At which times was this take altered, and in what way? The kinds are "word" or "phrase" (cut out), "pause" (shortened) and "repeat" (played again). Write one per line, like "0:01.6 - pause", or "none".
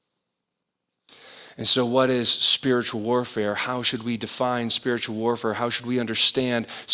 none